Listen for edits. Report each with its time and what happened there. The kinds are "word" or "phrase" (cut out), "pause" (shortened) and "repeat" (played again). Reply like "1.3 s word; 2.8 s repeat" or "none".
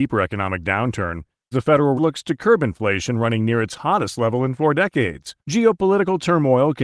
1.5 s word; 2.0 s word; 5.4 s pause